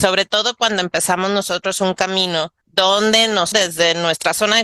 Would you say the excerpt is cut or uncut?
cut